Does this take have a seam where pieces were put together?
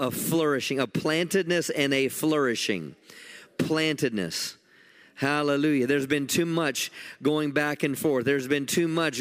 no; 0 cuts

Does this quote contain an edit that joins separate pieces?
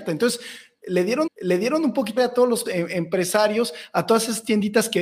yes; 3 cuts; at 1.3 s, 2.2 s, 2.7 s

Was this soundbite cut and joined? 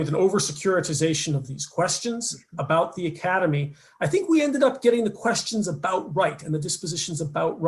no; 0 cuts

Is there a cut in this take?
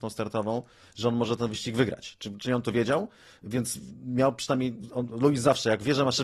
no; 0 cuts

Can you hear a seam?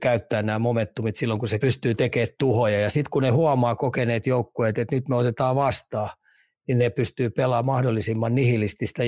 yes; 1 cut; at 1.6 s

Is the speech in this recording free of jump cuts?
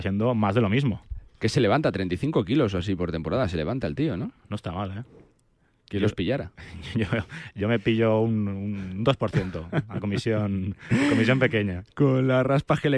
yes; 0 cuts

